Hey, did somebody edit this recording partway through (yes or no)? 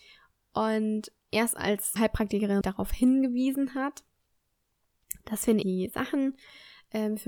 yes